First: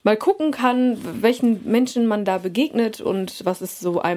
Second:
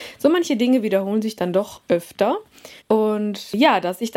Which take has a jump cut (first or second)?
second